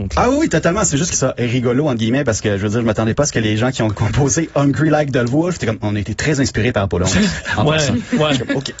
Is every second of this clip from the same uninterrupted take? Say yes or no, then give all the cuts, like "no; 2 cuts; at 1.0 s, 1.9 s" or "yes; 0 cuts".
no; 1 cut; at 1.1 s